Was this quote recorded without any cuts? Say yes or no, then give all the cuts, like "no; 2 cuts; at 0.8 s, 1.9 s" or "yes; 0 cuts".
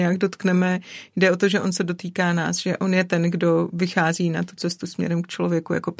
yes; 0 cuts